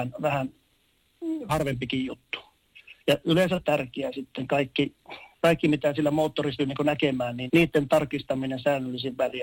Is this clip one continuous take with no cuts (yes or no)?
no